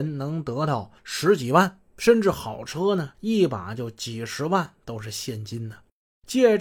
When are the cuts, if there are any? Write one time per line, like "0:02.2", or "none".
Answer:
0:01.0
0:01.9
0:03.1